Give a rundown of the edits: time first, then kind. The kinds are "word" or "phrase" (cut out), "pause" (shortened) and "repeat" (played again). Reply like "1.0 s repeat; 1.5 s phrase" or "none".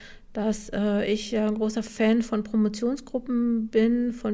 none